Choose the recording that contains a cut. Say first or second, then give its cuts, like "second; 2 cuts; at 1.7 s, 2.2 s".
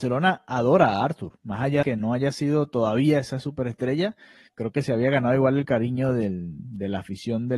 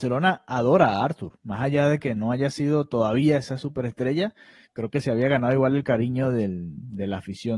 first; 1 cut; at 1.8 s